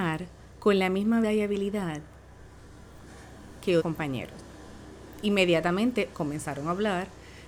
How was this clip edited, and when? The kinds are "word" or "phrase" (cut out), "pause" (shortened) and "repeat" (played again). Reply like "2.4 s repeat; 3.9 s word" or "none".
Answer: 1.2 s word; 3.8 s word; 6.1 s word